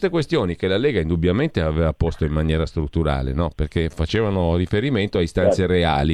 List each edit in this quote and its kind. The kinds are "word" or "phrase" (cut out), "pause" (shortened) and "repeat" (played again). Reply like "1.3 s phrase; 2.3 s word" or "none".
none